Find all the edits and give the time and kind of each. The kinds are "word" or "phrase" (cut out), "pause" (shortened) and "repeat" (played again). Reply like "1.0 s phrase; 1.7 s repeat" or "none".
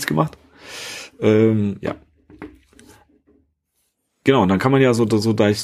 none